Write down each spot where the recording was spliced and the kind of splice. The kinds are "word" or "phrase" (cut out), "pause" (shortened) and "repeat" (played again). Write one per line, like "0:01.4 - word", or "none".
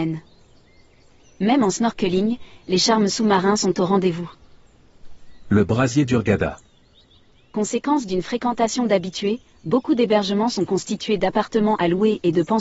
none